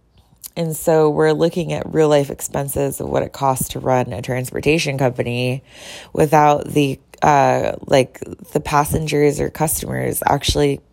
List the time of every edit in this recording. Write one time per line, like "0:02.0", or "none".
none